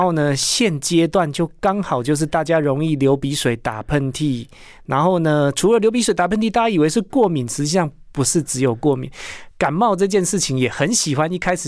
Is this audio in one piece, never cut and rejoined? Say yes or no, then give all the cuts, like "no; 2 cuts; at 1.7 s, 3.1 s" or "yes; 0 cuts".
yes; 0 cuts